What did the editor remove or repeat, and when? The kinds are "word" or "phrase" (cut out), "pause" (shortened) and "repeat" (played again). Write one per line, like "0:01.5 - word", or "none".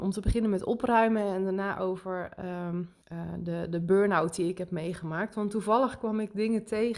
0:03.0 - pause